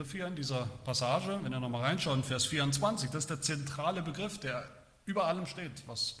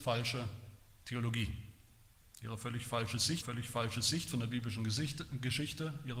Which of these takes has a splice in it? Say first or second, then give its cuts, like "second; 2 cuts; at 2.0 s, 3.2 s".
second; 1 cut; at 3.4 s